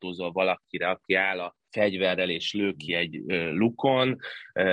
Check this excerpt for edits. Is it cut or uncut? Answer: cut